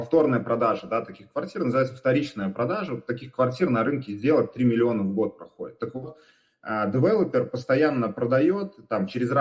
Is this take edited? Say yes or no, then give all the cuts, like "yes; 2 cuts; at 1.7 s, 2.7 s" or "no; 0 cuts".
no; 0 cuts